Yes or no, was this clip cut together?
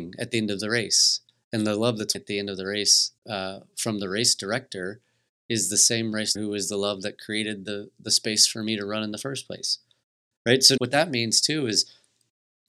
yes